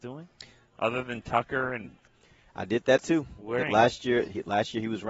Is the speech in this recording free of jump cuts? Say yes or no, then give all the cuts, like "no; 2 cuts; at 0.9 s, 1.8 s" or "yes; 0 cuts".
no; 3 cuts; at 1.8 s, 3.0 s, 3.6 s